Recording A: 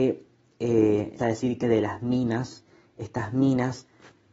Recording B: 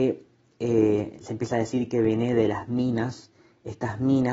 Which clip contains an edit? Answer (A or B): A